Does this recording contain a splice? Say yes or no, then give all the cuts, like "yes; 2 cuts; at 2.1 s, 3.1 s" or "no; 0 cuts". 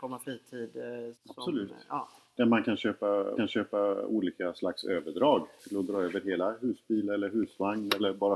yes; 2 cuts; at 1.1 s, 3.4 s